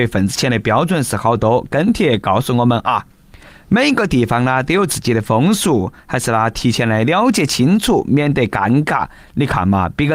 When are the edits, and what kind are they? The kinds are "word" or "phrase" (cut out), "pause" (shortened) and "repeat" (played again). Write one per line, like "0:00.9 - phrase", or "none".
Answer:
none